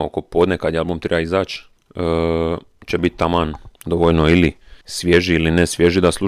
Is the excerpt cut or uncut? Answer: cut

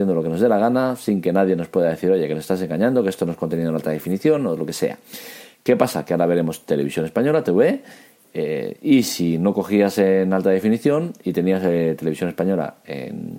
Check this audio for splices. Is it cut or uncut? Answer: uncut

